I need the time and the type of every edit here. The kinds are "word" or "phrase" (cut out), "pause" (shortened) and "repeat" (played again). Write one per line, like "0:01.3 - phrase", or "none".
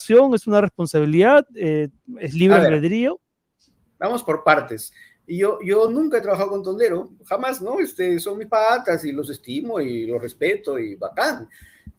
none